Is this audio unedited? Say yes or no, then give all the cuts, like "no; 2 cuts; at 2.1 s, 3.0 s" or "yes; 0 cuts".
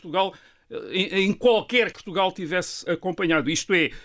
no; 2 cuts; at 1.9 s, 2.9 s